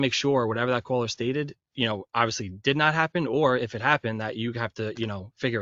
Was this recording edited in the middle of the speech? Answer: yes; 1 cut; at 1.6 s

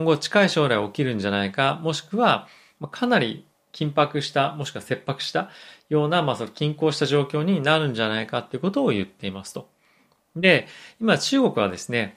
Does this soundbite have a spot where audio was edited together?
no; 0 cuts

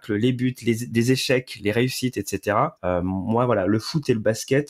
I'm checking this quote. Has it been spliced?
yes; 1 cut; at 2.8 s

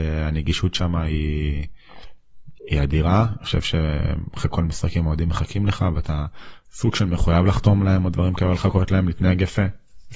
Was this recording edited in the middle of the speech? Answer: no; 0 cuts

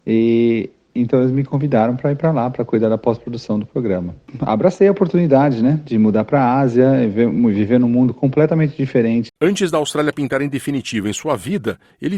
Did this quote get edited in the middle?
yes; 1 cut; at 9.4 s

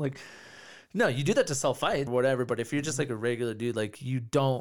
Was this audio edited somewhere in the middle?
yes; 1 cut; at 2.1 s

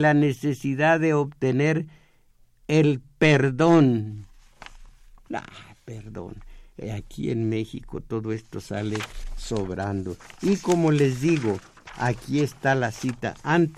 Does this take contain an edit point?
no; 0 cuts

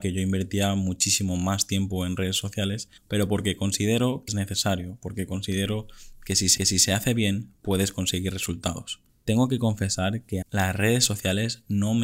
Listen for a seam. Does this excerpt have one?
yes; 5 cuts; at 3.0 s, 4.3 s, 6.6 s, 9.1 s, 10.4 s

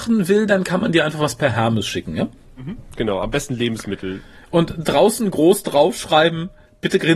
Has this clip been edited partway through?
no; 0 cuts

